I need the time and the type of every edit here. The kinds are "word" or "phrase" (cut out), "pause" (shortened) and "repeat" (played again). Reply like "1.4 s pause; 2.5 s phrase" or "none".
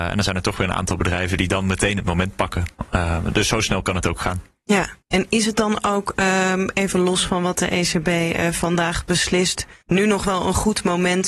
5.0 s pause; 9.8 s pause